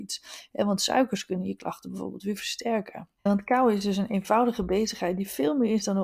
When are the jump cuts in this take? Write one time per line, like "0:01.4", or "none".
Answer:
0:03.2